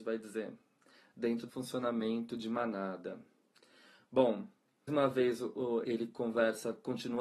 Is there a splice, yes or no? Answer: yes